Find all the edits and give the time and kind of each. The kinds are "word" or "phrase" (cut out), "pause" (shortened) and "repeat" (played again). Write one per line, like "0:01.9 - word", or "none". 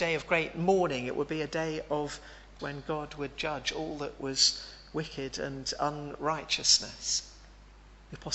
0:02.6 - word